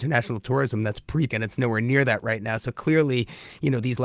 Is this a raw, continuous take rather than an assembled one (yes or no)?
no